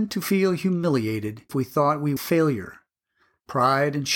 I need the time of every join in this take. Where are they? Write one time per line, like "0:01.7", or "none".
0:01.5
0:02.2